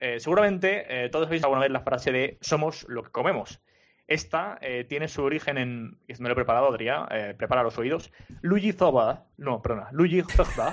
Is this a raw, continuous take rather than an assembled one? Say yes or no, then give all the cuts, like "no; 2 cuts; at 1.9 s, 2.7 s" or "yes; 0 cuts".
no; 2 cuts; at 1.4 s, 9.3 s